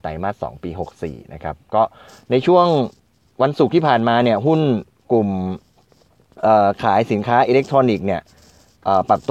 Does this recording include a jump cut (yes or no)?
no